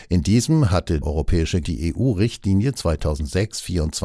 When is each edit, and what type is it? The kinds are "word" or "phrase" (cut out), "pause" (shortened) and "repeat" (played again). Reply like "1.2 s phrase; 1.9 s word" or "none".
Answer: 1.0 s word; 1.6 s word